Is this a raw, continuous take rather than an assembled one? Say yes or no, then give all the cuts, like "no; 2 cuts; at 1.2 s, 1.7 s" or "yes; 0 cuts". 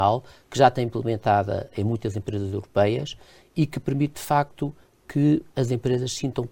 yes; 0 cuts